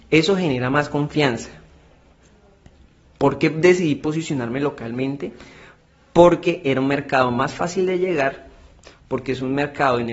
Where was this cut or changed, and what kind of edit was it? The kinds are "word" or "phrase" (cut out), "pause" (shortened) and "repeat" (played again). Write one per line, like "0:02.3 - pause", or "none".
none